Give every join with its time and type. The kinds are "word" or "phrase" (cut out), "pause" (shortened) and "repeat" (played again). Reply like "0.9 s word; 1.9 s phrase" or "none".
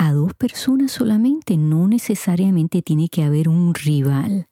none